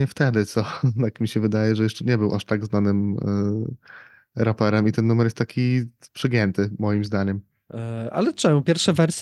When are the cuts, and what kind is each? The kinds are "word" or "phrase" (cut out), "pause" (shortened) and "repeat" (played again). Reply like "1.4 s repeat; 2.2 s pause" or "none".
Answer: none